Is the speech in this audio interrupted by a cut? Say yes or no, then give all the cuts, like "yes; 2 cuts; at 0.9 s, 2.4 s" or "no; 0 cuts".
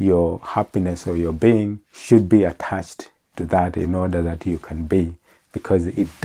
yes; 1 cut; at 1.8 s